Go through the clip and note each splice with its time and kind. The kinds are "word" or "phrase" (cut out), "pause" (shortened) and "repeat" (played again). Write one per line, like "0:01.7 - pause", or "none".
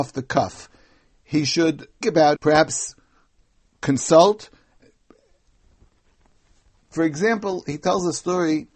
0:02.0 - word
0:02.3 - word